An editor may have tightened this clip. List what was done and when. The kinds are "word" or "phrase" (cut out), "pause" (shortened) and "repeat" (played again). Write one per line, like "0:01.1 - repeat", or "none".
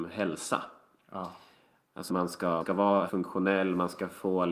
0:02.1 - word
0:02.6 - word
0:03.1 - word